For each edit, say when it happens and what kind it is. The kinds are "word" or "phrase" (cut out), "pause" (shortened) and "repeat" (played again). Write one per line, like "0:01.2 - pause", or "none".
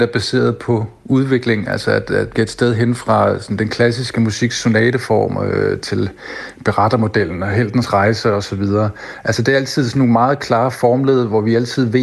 0:02.4 - word
0:05.8 - word

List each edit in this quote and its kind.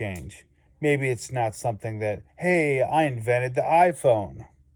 0:02.3 - pause

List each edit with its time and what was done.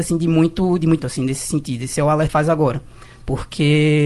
0:01.0 - word
0:02.3 - phrase

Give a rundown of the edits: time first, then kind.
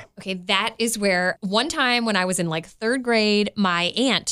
0:01.4 - phrase

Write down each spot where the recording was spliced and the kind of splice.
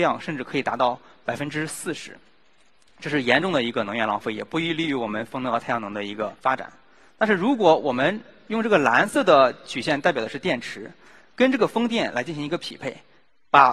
0:06.4 - pause

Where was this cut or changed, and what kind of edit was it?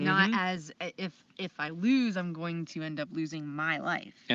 none

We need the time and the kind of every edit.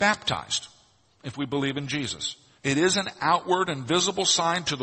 0:02.6 - pause

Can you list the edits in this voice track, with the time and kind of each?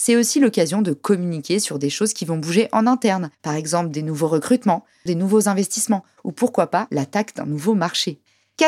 0:03.3 - pause

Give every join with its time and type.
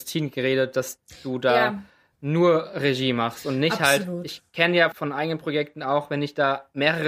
0:04.9 - word

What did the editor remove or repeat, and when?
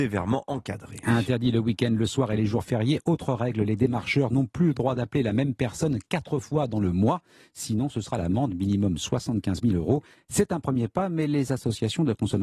none

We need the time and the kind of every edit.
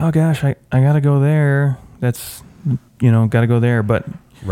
0:02.9 - pause

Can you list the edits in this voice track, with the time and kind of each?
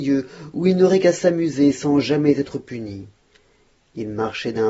none

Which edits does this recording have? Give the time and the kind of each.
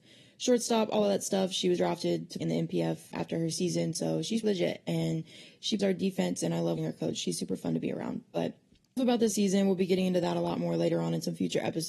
0:01.8 - word
0:02.4 - word
0:03.1 - word
0:03.5 - word
0:04.4 - word
0:05.8 - word
0:06.8 - word
0:09.0 - word
0:09.3 - word

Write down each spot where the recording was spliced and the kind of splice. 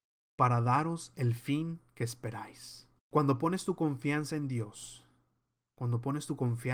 0:03.0 - pause

